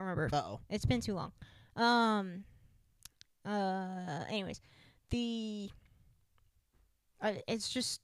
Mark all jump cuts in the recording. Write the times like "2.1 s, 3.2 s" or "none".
none